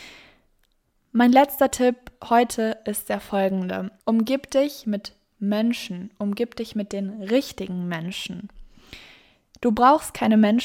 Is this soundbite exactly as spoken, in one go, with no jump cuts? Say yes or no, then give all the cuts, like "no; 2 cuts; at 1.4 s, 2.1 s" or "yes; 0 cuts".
no; 1 cut; at 4.0 s